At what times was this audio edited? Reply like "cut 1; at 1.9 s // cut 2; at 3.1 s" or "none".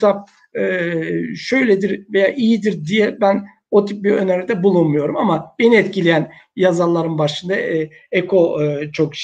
none